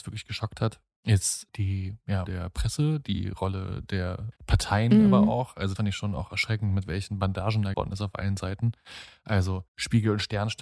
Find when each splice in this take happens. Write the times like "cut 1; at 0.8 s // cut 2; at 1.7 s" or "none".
cut 1; at 2.3 s // cut 2; at 4.4 s // cut 3; at 5.8 s // cut 4; at 7.7 s // cut 5; at 9.7 s